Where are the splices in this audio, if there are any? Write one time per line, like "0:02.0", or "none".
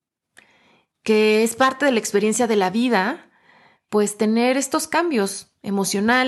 none